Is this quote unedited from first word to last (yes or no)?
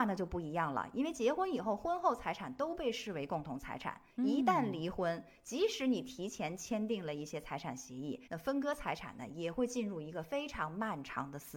no